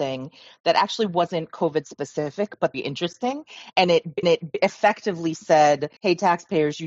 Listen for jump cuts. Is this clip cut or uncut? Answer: cut